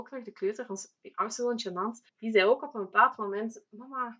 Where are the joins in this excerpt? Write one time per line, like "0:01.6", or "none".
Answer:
0:02.1